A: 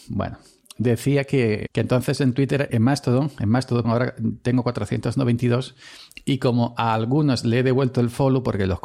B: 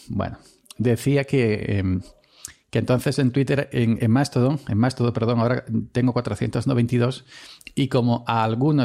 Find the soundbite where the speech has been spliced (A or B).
A